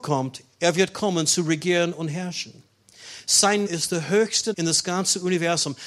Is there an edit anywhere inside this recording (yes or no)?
yes